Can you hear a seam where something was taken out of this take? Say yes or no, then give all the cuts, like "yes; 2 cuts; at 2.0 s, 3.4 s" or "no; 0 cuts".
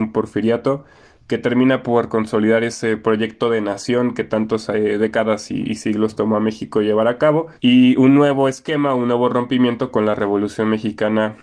yes; 1 cut; at 7.6 s